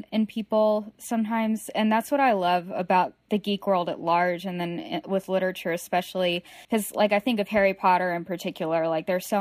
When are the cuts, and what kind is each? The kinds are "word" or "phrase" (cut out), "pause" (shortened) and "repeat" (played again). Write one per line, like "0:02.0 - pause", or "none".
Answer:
0:06.6 - pause